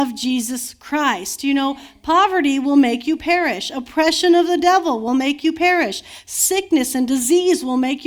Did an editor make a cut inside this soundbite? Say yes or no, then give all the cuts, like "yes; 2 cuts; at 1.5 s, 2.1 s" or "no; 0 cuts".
no; 0 cuts